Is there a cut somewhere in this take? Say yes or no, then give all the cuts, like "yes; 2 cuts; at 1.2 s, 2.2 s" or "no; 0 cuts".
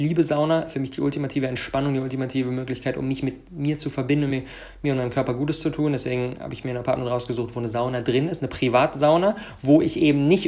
no; 0 cuts